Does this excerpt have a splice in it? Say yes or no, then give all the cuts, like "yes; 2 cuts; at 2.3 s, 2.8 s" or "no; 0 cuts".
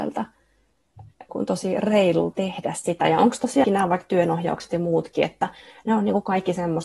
yes; 3 cuts; at 1.3 s, 2.3 s, 3.6 s